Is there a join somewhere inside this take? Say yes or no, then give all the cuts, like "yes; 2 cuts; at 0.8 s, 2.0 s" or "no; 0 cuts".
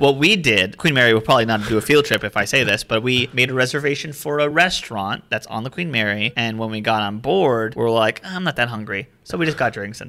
no; 0 cuts